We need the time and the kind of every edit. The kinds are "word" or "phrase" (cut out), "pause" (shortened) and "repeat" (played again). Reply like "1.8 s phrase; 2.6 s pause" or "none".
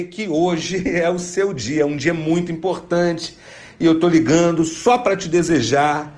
none